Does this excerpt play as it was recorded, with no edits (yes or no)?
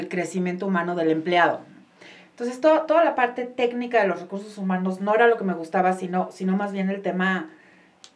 yes